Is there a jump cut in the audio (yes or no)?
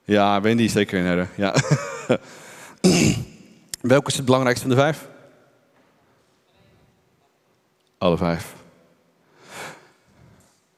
no